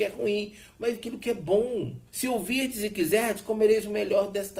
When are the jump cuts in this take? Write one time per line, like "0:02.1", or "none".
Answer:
0:00.9
0:02.1